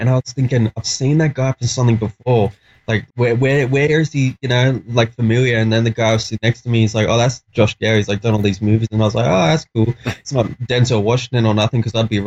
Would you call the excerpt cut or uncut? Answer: cut